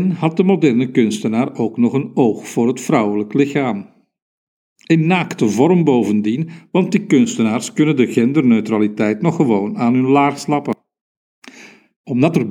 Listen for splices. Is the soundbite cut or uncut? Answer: uncut